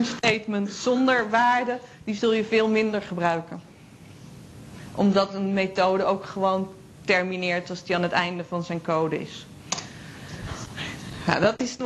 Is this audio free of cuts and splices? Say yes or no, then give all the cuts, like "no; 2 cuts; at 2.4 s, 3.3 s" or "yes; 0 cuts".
yes; 0 cuts